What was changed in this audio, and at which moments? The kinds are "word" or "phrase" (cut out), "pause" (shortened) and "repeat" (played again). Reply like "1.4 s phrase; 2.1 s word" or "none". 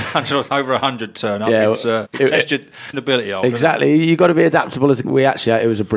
2.1 s word; 2.9 s word; 5.0 s phrase

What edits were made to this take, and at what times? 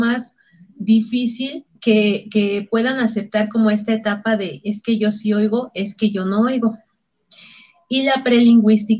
1.8 s pause

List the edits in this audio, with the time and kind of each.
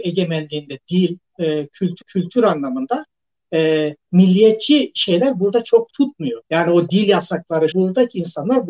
2.0 s repeat; 5.9 s word; 6.4 s pause; 7.7 s word

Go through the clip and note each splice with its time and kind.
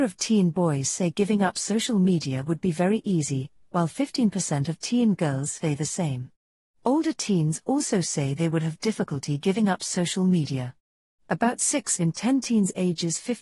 none

